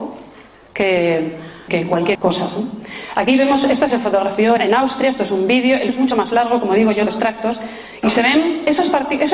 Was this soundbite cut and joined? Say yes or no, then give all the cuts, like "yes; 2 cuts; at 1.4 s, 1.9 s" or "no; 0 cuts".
yes; 6 cuts; at 1.7 s, 2.1 s, 3.9 s, 4.6 s, 5.9 s, 7.1 s